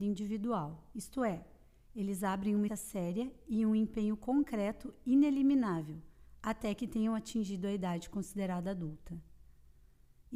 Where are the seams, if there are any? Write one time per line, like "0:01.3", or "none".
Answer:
0:02.7